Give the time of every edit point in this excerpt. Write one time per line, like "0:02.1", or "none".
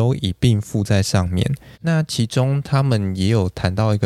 0:01.7